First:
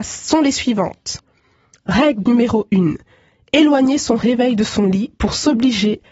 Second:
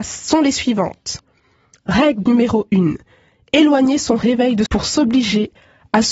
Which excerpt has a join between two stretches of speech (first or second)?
second